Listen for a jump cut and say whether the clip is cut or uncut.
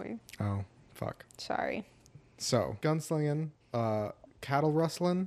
cut